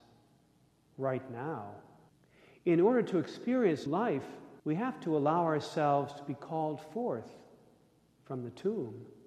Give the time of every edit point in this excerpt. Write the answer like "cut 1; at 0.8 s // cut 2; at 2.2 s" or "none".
cut 1; at 2.1 s // cut 2; at 3.9 s // cut 3; at 4.6 s